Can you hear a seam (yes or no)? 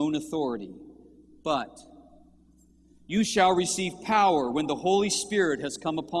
no